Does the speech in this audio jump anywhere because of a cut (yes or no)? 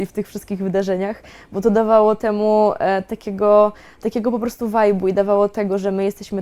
no